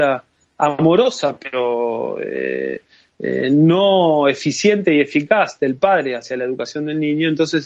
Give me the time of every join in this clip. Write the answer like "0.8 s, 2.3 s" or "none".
none